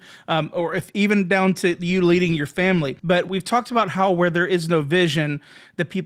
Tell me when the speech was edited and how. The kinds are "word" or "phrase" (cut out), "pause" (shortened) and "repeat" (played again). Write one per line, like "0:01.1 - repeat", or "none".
0:03.0 - pause